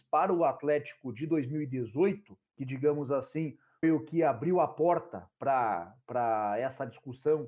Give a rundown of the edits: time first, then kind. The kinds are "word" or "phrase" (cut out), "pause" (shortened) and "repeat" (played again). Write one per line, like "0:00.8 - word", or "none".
0:02.5 - pause
0:03.8 - word